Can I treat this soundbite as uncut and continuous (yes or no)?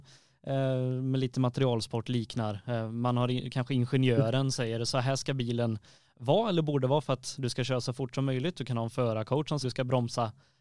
no